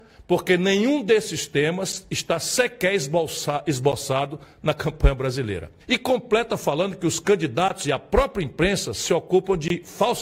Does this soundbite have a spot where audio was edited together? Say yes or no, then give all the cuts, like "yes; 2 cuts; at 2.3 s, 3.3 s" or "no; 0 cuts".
yes; 1 cut; at 5.8 s